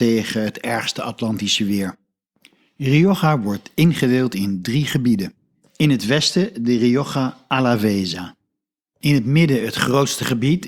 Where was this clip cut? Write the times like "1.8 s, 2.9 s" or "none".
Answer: none